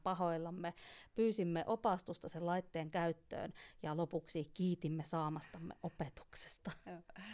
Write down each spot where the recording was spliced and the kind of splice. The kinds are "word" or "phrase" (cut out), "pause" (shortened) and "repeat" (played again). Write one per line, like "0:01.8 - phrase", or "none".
none